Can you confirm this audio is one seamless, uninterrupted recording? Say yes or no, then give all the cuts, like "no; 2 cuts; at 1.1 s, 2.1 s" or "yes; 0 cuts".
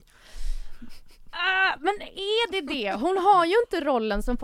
yes; 0 cuts